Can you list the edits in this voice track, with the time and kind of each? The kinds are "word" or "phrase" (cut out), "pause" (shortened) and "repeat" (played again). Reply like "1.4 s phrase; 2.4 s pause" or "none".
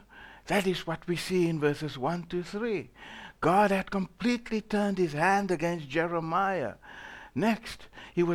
none